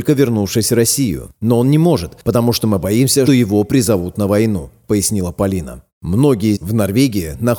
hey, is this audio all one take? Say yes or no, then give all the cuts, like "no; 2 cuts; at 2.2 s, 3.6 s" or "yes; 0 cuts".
no; 2 cuts; at 3.3 s, 6.6 s